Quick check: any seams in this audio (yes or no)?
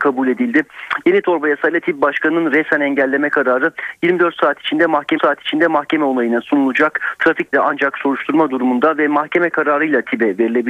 yes